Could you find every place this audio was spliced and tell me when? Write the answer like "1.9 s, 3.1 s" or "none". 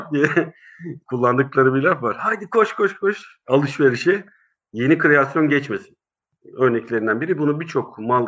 none